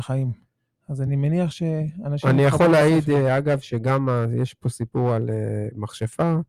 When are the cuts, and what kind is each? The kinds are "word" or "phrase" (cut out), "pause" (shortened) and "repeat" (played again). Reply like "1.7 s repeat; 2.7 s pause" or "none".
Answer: none